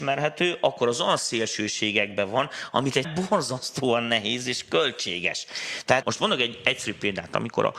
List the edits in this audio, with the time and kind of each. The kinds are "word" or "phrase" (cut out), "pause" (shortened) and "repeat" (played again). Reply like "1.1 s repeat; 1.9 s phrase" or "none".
3.0 s word; 6.0 s word